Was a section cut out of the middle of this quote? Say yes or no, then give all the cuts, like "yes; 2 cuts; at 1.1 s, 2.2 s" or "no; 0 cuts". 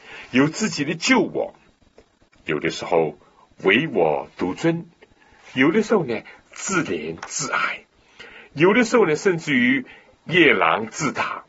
no; 0 cuts